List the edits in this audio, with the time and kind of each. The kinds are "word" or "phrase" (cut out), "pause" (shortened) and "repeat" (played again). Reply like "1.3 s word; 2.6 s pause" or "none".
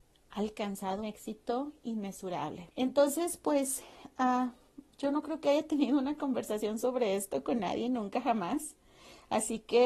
1.0 s word; 2.7 s pause